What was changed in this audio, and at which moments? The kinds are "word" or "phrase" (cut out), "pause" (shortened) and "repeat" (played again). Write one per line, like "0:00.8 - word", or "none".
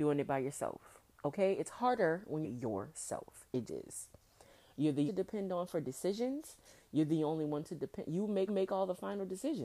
0:02.4 - phrase
0:03.7 - word
0:05.1 - phrase
0:08.5 - repeat